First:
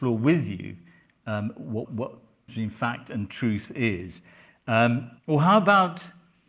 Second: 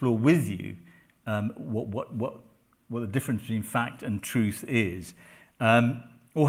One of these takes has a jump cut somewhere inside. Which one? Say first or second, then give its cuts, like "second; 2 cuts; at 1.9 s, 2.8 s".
first; 3 cuts; at 1.8 s, 2.5 s, 5.2 s